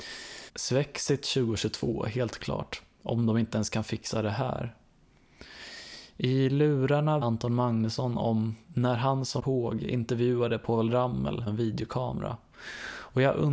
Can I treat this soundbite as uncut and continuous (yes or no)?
no